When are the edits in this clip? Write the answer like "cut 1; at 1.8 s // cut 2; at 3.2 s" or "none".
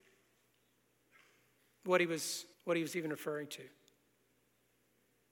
cut 1; at 2.5 s